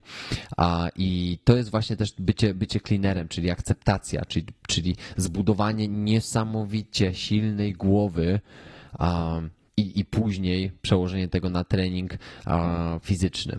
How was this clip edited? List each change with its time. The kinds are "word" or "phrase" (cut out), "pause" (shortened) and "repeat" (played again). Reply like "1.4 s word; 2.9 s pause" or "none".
9.7 s pause